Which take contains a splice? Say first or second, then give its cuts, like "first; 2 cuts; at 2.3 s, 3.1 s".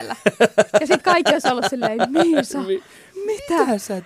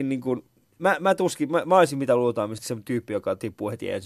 second; 1 cut; at 2.6 s